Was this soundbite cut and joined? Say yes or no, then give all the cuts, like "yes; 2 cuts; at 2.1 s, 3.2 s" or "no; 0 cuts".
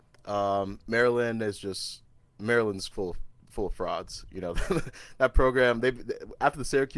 no; 0 cuts